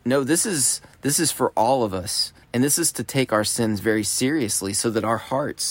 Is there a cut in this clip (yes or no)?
yes